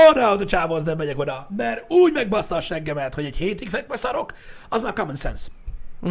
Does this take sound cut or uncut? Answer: uncut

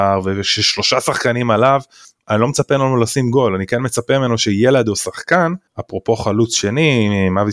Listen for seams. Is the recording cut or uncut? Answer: cut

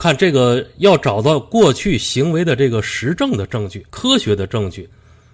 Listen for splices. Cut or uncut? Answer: cut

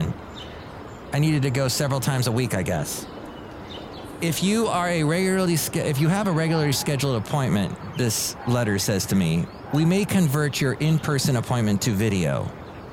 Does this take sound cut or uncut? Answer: uncut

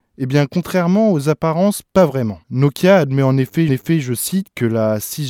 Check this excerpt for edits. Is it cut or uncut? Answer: cut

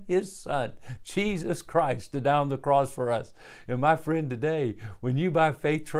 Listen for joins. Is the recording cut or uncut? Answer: uncut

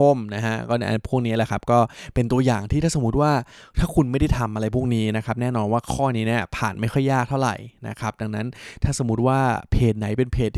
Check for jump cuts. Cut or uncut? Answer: uncut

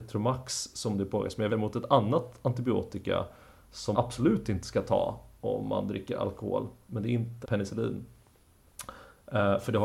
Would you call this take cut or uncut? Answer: cut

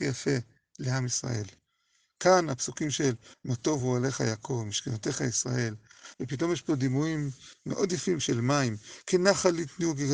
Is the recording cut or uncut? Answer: uncut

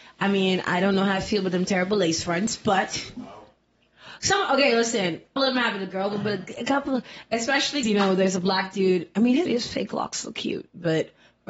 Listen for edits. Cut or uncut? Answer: cut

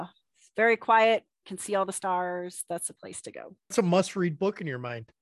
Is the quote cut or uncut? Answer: cut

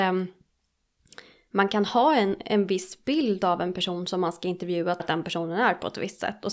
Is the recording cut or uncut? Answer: cut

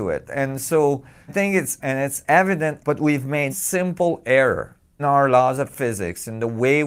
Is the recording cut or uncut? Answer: cut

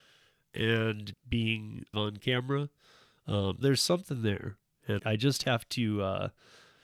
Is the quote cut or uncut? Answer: cut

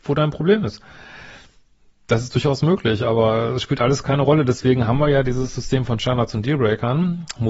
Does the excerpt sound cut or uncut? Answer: uncut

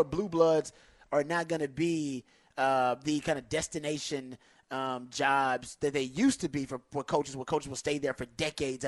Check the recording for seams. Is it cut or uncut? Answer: uncut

